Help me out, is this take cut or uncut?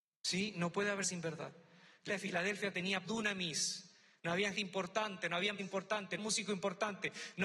cut